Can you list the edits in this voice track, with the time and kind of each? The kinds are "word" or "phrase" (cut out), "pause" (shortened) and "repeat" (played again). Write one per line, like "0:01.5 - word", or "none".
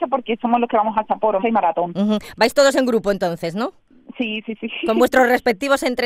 0:01.4 - word